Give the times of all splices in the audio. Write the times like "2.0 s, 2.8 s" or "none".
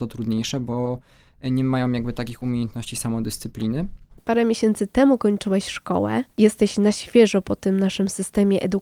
none